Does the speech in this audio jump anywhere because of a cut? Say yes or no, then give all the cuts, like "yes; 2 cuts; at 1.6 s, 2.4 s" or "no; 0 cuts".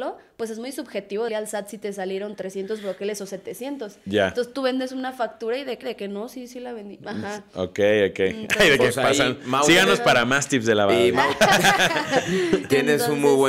yes; 2 cuts; at 1.3 s, 5.8 s